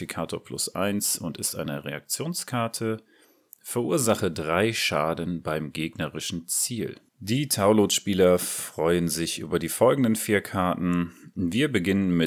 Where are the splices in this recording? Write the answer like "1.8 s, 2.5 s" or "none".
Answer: 7.1 s